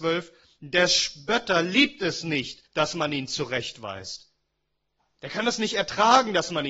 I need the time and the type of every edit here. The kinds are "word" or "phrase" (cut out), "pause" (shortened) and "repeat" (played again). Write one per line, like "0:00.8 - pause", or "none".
0:02.7 - pause